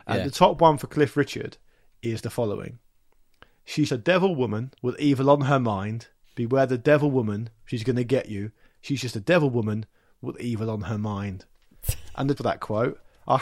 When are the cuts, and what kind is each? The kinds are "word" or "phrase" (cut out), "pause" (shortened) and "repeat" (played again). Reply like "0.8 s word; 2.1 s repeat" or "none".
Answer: 3.9 s word; 4.8 s pause; 12.4 s word